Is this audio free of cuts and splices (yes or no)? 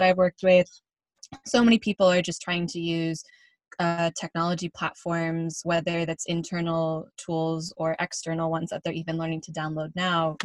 yes